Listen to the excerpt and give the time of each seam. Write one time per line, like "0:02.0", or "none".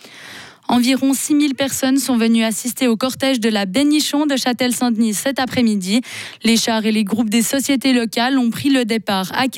none